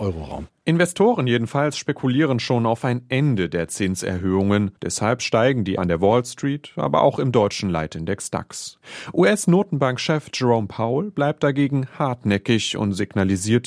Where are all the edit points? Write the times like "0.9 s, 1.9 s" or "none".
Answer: 4.8 s, 5.8 s